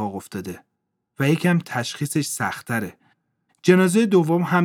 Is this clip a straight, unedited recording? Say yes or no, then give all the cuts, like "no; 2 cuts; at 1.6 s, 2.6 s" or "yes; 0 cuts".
yes; 0 cuts